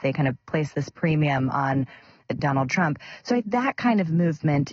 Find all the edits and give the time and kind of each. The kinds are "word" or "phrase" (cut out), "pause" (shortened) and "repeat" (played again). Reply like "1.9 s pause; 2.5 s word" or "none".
2.4 s word; 3.4 s word